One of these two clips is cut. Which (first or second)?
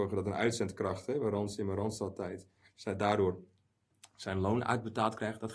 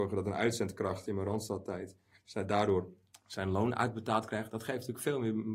second